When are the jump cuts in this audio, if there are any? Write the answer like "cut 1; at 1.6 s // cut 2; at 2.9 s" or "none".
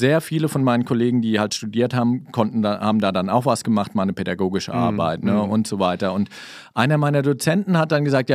cut 1; at 1.5 s